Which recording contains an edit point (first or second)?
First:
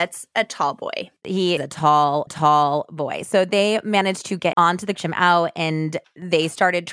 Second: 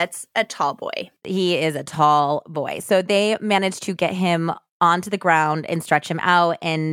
first